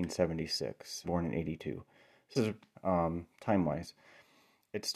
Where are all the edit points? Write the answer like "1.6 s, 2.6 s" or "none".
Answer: 1.0 s, 2.3 s, 2.7 s